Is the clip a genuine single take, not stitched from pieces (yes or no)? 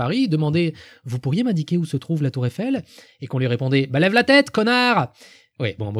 yes